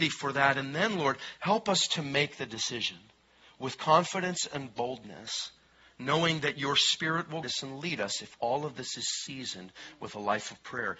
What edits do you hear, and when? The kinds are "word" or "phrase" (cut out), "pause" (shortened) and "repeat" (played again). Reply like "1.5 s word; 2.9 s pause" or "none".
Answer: 7.4 s word

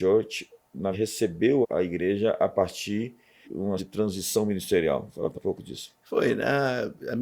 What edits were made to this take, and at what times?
0.9 s word; 1.6 s word; 3.4 s word; 3.8 s word; 5.3 s word

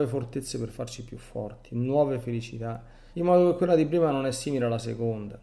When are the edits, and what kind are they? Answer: 3.1 s pause

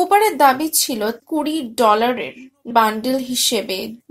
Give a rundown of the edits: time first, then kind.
1.2 s word; 2.7 s word

